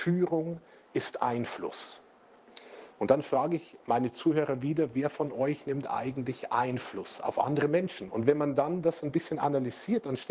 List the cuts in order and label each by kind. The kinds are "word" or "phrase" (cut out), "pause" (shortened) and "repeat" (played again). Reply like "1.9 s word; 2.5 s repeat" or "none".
none